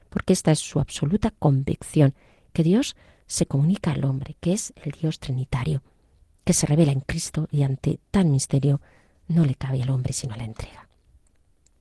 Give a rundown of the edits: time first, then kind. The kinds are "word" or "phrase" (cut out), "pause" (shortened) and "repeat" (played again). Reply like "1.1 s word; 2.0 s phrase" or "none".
none